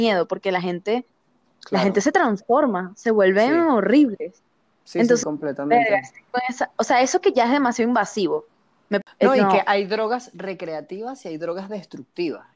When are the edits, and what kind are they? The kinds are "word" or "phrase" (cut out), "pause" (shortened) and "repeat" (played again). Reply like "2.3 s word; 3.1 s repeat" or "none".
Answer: 5.2 s word